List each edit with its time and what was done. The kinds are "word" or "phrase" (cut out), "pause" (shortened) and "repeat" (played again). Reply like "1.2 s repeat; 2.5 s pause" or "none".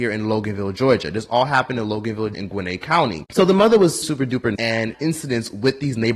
2.3 s word; 4.0 s word; 4.6 s word; 4.9 s phrase

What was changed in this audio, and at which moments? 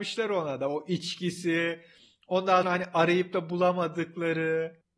2.6 s word

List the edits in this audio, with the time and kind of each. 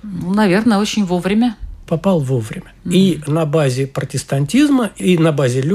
1.9 s word; 2.8 s pause

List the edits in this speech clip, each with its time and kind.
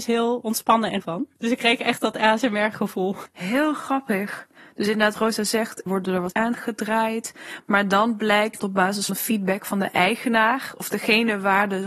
1.0 s word; 5.1 s word; 5.9 s word; 6.3 s word; 8.6 s word; 9.1 s word

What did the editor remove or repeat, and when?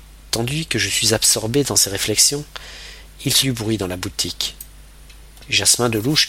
3.4 s word

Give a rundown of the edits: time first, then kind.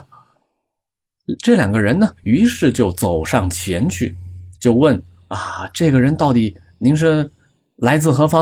4.6 s pause

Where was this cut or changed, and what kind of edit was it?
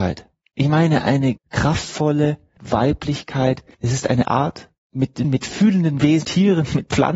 1.4 s word; 2.6 s word; 4.2 s word; 5.2 s word; 6.2 s word

